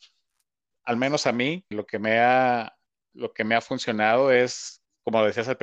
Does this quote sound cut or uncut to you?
cut